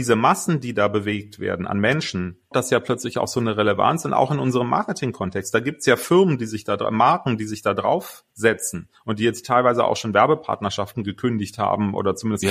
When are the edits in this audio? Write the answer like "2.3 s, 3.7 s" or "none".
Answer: 2.5 s, 8.3 s